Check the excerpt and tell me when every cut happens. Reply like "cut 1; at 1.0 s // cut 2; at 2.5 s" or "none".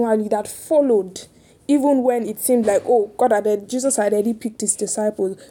none